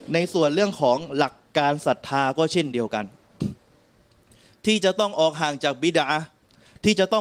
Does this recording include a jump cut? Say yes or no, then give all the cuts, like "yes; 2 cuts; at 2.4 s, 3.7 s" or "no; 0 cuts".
no; 0 cuts